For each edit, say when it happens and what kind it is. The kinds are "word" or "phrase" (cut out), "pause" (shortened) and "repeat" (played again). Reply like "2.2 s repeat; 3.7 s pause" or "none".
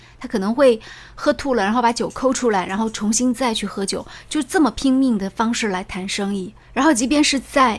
6.6 s pause